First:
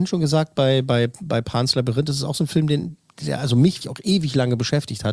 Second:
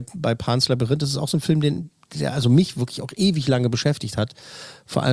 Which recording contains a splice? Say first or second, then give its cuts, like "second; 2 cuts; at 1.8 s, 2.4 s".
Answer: first; 1 cut; at 3.8 s